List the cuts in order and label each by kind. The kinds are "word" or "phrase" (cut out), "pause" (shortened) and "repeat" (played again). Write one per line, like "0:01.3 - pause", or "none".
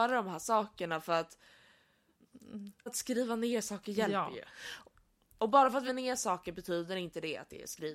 0:02.9 - word
0:05.9 - word